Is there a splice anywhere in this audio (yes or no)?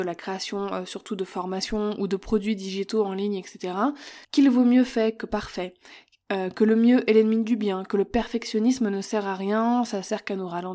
yes